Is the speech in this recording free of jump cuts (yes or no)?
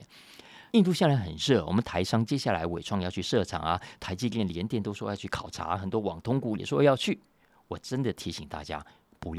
yes